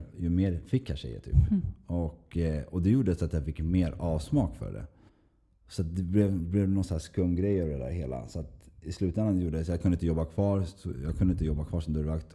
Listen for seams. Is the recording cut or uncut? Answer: cut